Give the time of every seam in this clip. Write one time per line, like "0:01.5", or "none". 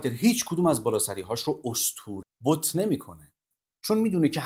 0:02.2